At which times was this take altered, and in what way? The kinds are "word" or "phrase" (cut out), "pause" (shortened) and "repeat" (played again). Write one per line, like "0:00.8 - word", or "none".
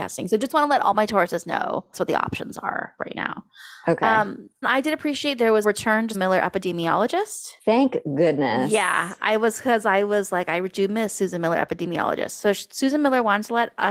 0:01.9 - word
0:03.0 - word
0:04.6 - word
0:05.6 - word
0:06.1 - word
0:07.6 - pause